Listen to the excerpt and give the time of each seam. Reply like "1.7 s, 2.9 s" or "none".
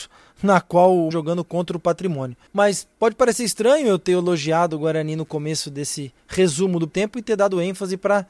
1.1 s, 2.5 s, 6.9 s